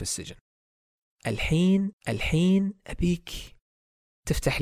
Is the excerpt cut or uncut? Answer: cut